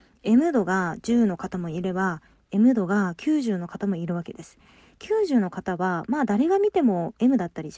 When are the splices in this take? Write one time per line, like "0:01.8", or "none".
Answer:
none